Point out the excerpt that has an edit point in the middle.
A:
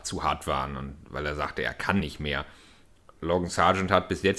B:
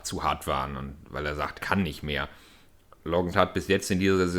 B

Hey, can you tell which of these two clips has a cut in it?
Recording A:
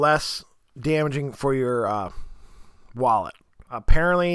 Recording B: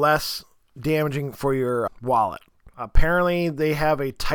B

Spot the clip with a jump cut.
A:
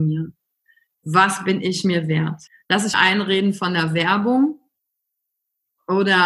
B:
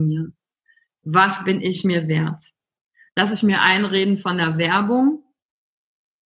A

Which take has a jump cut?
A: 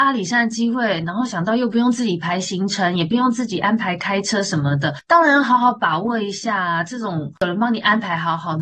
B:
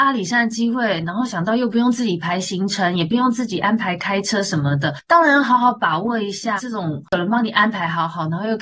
B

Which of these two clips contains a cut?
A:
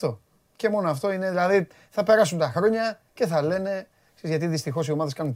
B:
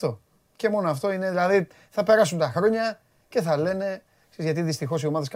A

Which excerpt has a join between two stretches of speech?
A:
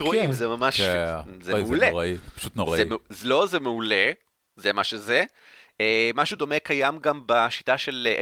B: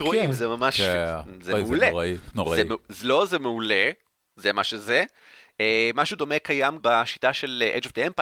B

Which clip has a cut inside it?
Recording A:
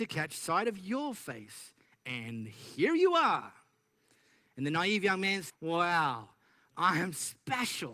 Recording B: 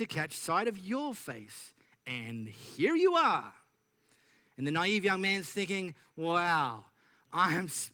A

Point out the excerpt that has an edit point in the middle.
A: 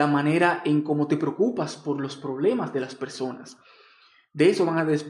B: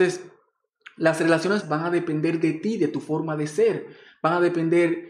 B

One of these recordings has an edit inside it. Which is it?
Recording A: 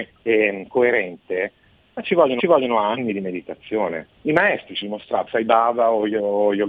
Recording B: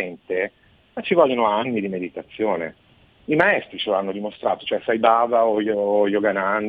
A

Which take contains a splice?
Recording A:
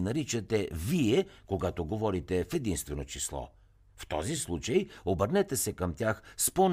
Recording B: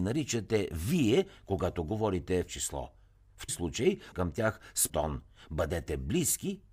B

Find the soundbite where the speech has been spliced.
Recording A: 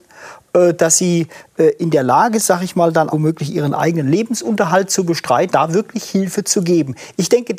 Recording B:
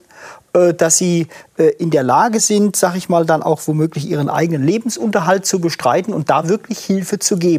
A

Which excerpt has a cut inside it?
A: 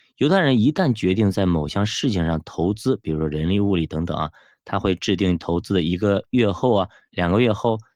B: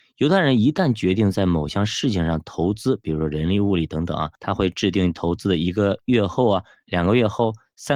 B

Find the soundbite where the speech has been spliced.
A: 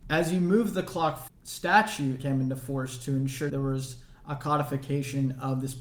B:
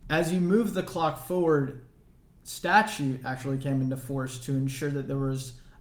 A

